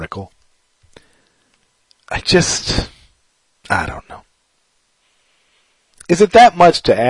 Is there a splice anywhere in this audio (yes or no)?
no